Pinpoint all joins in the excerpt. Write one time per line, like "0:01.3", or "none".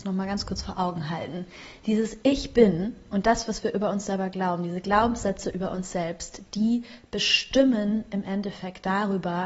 none